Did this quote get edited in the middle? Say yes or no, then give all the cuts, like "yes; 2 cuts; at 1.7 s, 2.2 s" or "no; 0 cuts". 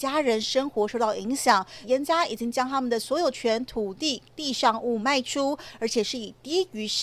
yes; 1 cut; at 1.8 s